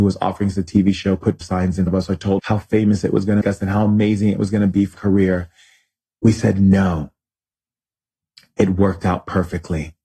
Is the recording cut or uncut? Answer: cut